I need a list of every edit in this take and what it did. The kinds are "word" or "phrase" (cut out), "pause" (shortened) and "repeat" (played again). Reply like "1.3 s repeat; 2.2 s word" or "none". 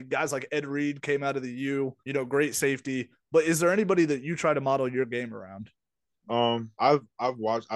2.0 s pause; 6.7 s pause